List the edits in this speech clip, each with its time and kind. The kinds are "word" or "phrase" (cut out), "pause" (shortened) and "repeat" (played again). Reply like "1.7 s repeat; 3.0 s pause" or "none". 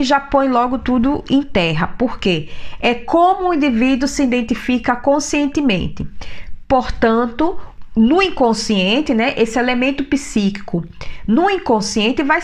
none